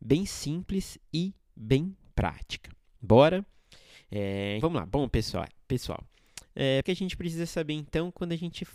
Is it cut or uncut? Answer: cut